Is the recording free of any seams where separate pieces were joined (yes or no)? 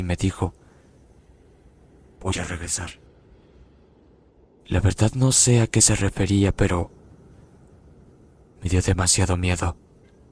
yes